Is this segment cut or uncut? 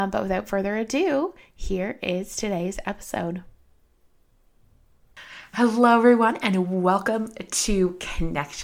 uncut